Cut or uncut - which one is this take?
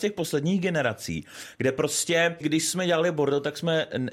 cut